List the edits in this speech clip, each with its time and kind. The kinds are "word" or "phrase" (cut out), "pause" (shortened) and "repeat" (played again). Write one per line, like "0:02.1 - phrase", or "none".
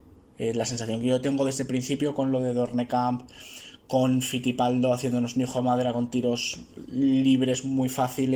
none